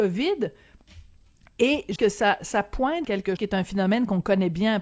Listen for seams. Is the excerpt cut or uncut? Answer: cut